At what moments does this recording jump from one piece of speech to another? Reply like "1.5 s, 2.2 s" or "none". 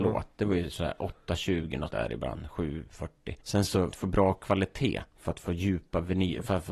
1.9 s, 3.4 s, 3.9 s, 5.1 s